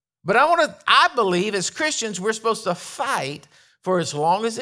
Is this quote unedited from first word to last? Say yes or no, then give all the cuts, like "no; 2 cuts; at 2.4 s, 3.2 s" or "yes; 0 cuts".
yes; 0 cuts